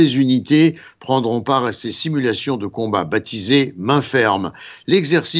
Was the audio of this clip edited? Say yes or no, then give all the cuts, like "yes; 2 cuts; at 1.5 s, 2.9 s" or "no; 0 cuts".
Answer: no; 0 cuts